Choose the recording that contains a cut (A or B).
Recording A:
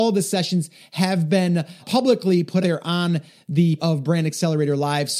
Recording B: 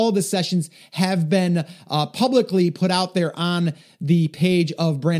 A